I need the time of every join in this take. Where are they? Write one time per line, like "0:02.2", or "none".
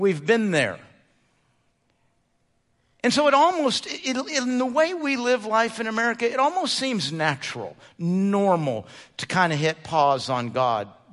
none